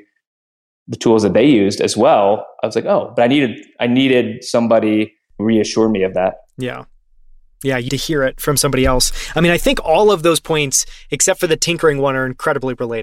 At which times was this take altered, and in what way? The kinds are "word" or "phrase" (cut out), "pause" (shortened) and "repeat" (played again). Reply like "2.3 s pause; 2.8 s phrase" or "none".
5.4 s word; 7.9 s word